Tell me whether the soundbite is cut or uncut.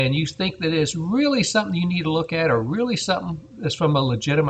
uncut